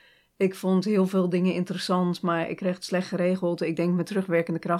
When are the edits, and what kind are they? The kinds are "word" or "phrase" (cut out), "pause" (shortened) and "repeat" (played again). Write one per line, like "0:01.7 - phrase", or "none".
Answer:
none